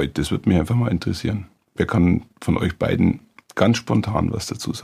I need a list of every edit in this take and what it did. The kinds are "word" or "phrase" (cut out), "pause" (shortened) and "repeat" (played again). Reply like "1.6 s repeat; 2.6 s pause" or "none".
none